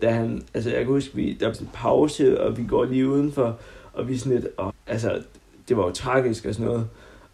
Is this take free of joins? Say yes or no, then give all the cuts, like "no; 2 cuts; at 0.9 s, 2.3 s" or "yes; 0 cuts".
no; 2 cuts; at 1.5 s, 4.7 s